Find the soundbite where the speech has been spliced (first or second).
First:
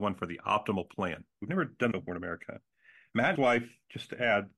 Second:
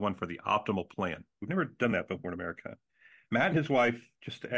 first